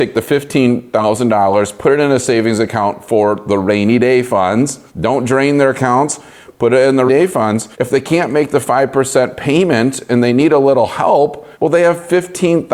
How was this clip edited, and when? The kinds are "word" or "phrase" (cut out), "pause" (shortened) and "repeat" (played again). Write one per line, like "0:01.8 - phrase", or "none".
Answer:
0:04.9 - pause
0:07.1 - word
0:07.7 - pause
0:11.5 - pause